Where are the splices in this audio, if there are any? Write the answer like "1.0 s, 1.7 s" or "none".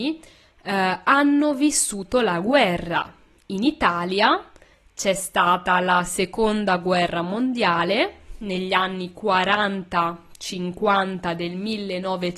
none